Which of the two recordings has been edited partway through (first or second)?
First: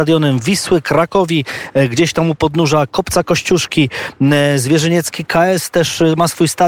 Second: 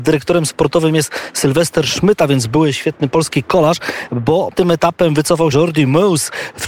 second